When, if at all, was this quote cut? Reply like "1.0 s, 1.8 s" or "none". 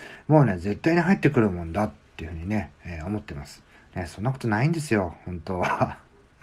3.8 s

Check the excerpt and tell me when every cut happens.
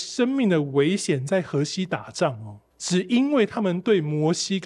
2.7 s

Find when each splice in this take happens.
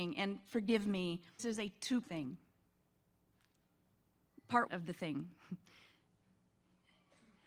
1.4 s, 2.0 s, 4.7 s

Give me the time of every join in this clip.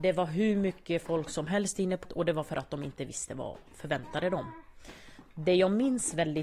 2.0 s

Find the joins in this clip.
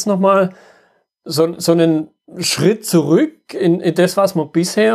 none

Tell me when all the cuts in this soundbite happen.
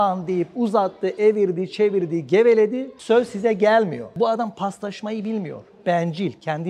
none

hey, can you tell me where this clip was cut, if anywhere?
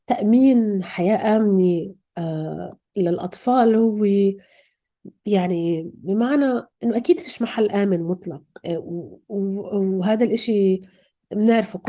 6.7 s

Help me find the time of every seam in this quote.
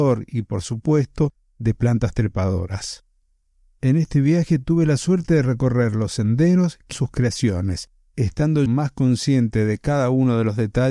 6.9 s, 8.7 s

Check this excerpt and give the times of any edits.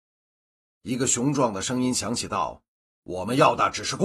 none

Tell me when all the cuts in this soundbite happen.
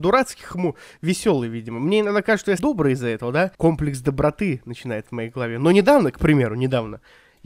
2.6 s, 3.5 s

